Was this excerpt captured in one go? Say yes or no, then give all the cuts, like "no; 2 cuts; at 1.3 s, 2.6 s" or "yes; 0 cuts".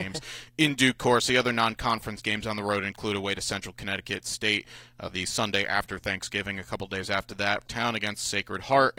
no; 1 cut; at 7.6 s